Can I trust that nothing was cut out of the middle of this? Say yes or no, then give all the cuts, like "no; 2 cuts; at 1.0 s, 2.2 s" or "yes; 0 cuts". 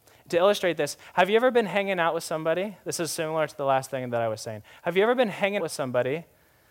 no; 1 cut; at 5.6 s